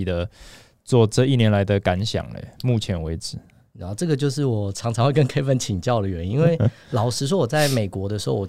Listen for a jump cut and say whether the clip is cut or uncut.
uncut